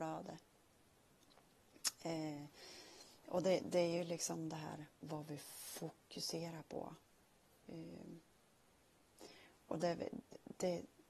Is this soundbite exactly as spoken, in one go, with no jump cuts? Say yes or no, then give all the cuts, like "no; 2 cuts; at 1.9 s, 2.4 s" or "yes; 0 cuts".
yes; 0 cuts